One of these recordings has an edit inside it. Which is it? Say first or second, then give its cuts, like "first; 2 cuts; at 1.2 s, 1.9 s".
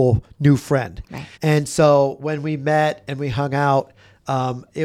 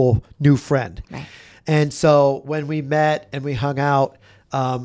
first; 1 cut; at 1.3 s